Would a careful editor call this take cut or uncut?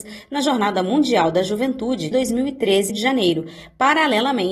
cut